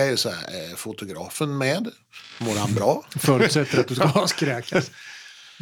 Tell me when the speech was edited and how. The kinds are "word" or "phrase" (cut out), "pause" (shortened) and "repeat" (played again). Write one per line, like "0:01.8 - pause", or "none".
none